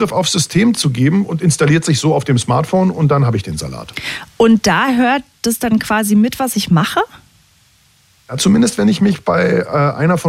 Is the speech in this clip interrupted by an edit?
no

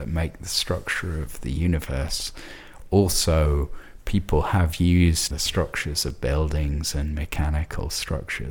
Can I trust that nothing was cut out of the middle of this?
no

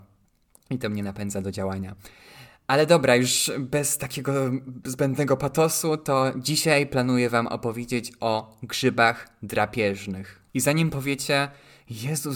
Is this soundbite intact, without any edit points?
no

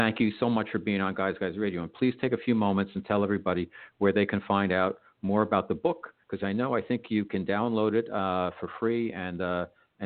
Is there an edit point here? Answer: yes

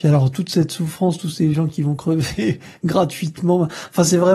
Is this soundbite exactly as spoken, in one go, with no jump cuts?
yes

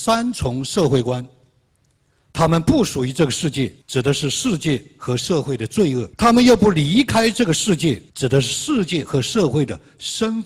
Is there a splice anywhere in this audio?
yes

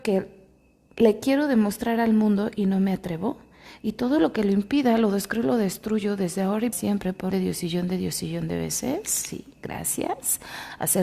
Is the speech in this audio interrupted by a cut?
yes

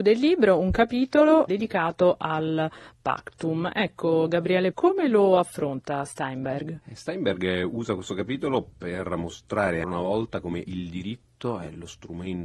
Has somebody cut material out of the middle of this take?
yes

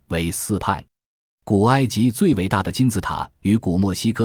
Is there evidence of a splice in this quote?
no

